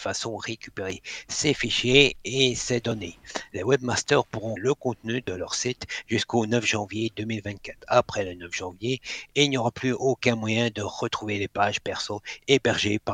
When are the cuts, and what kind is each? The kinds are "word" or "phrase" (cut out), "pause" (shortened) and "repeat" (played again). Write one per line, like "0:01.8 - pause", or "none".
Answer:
0:04.6 - word